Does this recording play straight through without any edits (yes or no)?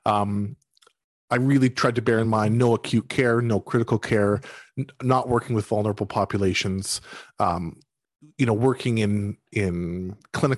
yes